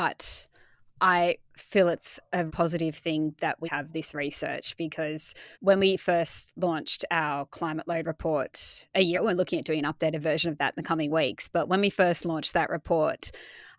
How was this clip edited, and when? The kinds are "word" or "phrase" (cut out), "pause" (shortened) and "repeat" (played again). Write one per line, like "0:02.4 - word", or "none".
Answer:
0:01.4 - pause
0:02.5 - word
0:03.6 - word
0:05.5 - pause
0:09.1 - word